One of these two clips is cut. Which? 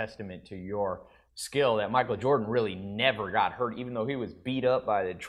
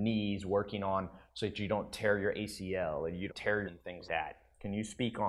second; 3 cuts; at 3.3 s, 3.6 s, 4.1 s

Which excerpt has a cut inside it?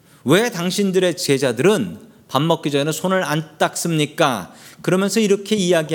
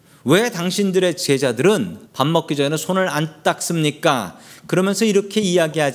second; 1 cut; at 2.1 s

